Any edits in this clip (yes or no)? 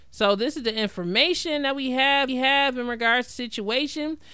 yes